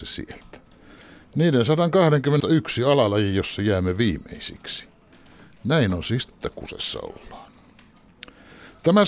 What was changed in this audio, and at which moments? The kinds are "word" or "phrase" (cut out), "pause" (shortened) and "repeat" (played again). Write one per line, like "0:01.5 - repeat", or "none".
0:02.4 - word
0:06.3 - word